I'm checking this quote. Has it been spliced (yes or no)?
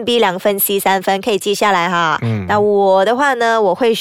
no